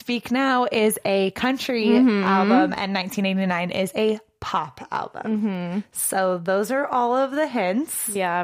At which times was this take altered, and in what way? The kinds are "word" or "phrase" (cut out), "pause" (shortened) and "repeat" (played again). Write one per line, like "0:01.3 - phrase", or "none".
none